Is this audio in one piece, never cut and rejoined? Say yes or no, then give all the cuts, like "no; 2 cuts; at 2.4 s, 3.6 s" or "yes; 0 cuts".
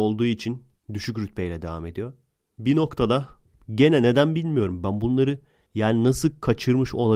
yes; 0 cuts